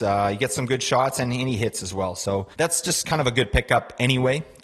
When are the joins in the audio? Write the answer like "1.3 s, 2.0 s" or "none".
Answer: 2.5 s